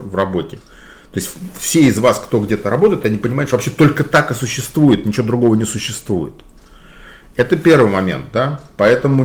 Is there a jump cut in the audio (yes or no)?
no